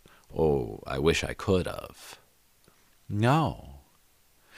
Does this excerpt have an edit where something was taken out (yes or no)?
no